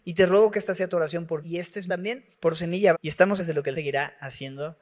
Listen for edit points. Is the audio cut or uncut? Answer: cut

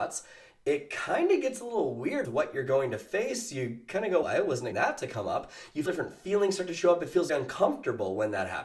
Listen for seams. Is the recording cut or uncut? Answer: cut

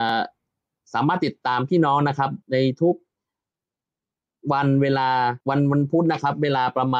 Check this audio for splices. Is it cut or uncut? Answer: cut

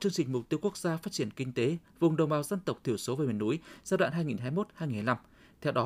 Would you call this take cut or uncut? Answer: uncut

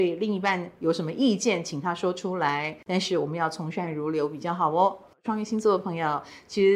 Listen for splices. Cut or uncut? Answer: uncut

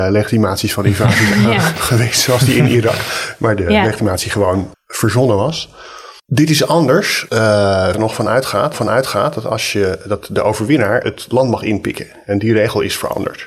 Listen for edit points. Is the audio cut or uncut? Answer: cut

